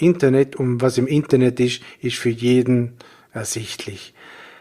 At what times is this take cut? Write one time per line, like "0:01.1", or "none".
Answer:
none